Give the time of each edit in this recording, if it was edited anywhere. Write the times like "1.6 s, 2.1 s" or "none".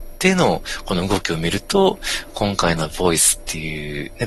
2.9 s